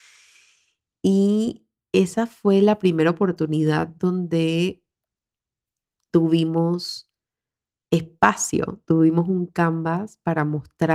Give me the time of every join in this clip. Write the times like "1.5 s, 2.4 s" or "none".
none